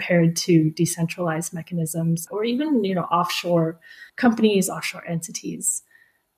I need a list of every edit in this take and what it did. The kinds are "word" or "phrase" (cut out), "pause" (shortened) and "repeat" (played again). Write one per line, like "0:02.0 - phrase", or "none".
0:02.3 - word
0:04.1 - pause